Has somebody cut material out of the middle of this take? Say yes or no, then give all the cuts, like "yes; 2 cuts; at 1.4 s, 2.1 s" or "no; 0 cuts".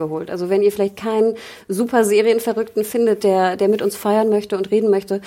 no; 0 cuts